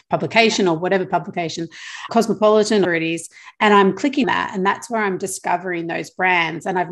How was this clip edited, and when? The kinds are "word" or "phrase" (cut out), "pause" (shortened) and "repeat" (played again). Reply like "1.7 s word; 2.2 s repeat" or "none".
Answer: 2.1 s word; 2.8 s phrase; 4.2 s word